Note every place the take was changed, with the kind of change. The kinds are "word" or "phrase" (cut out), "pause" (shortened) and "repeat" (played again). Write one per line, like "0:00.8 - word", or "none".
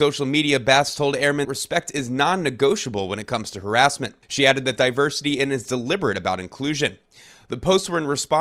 0:01.4 - word
0:04.2 - pause
0:04.8 - phrase